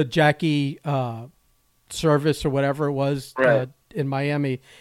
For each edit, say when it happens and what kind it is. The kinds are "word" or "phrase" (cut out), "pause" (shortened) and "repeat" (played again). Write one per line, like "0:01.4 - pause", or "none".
none